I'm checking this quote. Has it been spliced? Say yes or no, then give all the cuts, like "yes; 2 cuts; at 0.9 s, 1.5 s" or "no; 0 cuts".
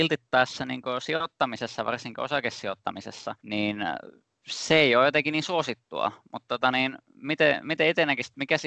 yes; 1 cut; at 3.4 s